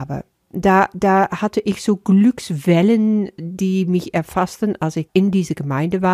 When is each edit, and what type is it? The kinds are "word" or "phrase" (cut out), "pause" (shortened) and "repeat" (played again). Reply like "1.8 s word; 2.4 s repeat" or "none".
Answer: 5.1 s word